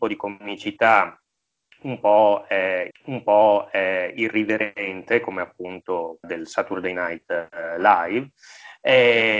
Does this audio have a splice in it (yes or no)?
yes